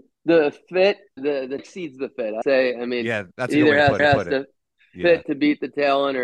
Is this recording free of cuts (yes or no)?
no